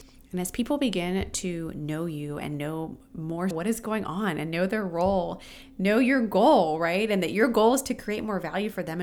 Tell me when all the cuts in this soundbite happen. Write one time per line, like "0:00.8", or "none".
0:03.5